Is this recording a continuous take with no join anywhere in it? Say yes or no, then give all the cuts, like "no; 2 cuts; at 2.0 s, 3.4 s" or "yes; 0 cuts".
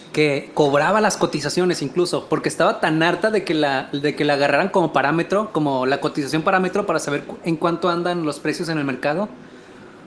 yes; 0 cuts